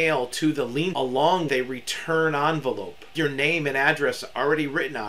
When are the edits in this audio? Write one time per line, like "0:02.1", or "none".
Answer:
0:00.9
0:01.5
0:03.1